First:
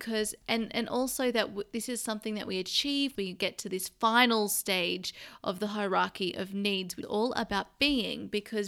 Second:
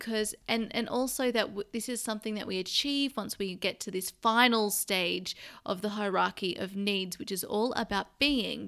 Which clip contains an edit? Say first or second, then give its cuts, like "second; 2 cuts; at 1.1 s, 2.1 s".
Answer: first; 2 cuts; at 3.1 s, 7.0 s